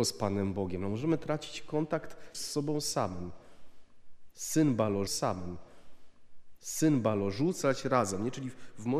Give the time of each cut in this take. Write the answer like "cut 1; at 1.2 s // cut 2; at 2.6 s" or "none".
cut 1; at 2.3 s // cut 2; at 5.1 s